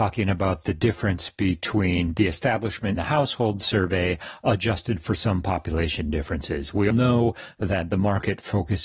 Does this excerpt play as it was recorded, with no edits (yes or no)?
no